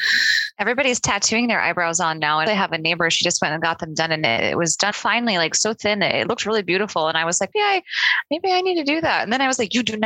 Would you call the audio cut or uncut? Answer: cut